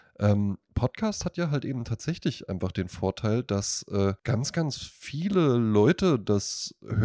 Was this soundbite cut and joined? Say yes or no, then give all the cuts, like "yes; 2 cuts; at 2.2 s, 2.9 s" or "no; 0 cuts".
yes; 1 cut; at 4.2 s